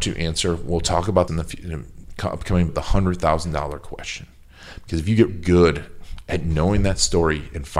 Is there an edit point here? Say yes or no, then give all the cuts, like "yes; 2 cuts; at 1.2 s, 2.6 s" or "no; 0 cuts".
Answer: yes; 3 cuts; at 1.3 s, 2.7 s, 5.3 s